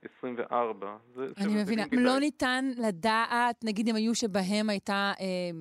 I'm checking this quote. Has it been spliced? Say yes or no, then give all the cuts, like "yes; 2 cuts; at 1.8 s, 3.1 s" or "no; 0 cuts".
yes; 3 cuts; at 1.3 s, 1.9 s, 4.1 s